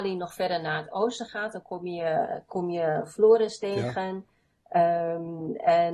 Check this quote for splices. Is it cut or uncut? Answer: uncut